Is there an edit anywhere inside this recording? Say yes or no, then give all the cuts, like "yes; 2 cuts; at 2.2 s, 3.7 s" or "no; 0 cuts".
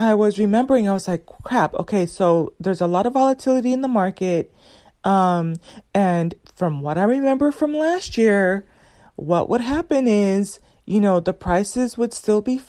no; 0 cuts